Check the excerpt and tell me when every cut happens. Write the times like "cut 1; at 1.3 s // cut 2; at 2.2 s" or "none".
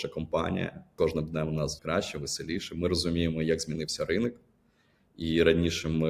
cut 1; at 1.8 s

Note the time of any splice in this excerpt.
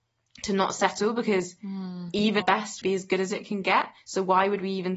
cut 1; at 2.4 s // cut 2; at 2.8 s

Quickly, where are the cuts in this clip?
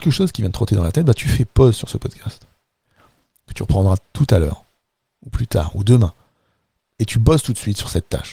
none

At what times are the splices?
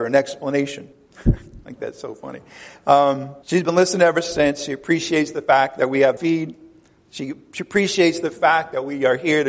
cut 1; at 0.9 s // cut 2; at 3.4 s // cut 3; at 6.2 s

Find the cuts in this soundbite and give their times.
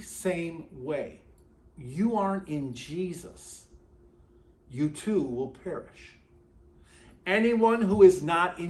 cut 1; at 1.6 s

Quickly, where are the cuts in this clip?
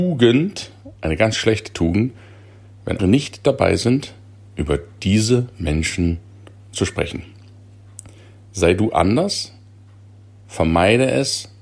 cut 1; at 3.0 s

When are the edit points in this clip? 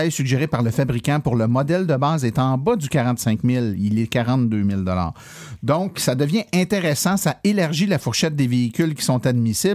none

